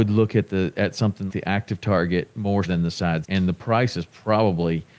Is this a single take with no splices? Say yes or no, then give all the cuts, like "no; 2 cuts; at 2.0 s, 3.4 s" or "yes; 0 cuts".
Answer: no; 3 cuts; at 1.3 s, 2.6 s, 3.2 s